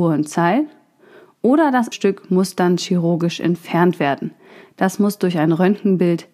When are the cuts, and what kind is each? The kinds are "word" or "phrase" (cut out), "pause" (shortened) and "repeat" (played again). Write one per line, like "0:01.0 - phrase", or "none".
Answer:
0:01.9 - word